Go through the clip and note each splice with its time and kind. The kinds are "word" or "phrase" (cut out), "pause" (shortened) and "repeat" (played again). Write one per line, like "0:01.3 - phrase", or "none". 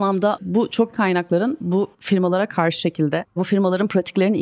0:00.9 - word
0:01.9 - pause
0:02.8 - word